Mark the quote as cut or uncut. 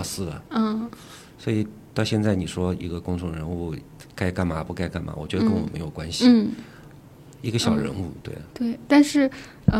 cut